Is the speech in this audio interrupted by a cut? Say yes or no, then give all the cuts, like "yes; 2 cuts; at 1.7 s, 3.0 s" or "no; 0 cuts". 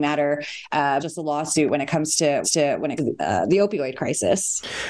yes; 3 cuts; at 1.0 s, 2.4 s, 3.0 s